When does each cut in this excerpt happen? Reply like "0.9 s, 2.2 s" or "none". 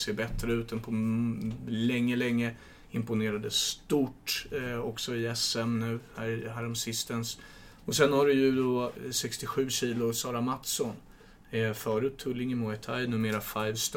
none